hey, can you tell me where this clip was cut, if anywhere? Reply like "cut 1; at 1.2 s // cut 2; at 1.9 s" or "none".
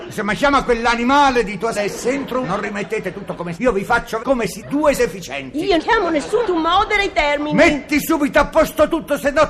cut 1; at 1.7 s // cut 2; at 2.4 s // cut 3; at 3.6 s // cut 4; at 4.2 s // cut 5; at 4.6 s // cut 6; at 5.0 s // cut 7; at 5.8 s // cut 8; at 6.4 s